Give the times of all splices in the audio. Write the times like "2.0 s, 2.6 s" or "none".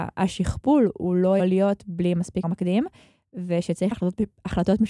1.4 s, 2.4 s, 3.9 s